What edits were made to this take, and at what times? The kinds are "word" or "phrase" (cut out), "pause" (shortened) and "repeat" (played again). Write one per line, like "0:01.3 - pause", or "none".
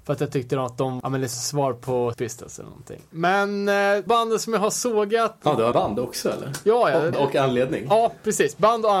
0:01.0 - word
0:01.3 - word
0:02.1 - word
0:04.1 - word
0:05.7 - word
0:07.1 - word